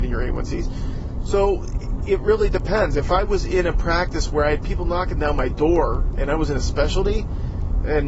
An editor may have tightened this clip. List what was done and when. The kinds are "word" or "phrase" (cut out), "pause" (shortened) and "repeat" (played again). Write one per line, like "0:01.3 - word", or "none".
none